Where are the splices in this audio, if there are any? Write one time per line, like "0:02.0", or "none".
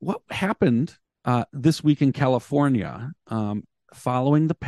0:01.0